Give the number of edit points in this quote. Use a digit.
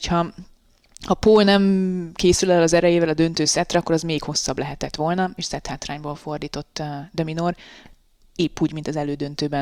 0